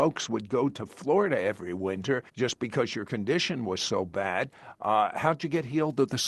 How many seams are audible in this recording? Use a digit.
1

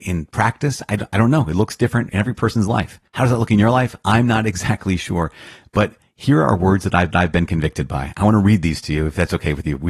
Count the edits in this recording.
3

